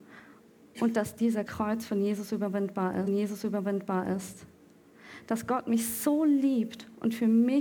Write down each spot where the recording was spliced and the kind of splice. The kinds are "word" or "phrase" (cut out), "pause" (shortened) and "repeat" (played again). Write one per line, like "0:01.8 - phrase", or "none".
0:01.5 - phrase
0:03.1 - repeat